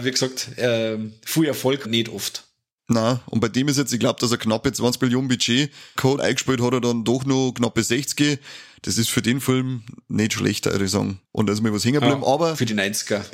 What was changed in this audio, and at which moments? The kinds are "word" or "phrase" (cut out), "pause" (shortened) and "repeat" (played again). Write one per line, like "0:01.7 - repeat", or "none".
0:01.8 - phrase
0:06.2 - phrase
0:11.2 - pause